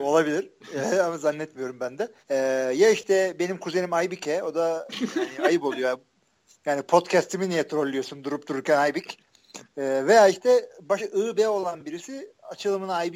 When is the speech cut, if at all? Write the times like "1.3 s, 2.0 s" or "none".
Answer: 2.2 s, 11.0 s